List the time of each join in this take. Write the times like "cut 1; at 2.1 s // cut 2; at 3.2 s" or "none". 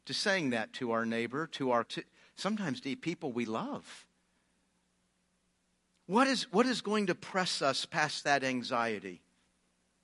cut 1; at 1.8 s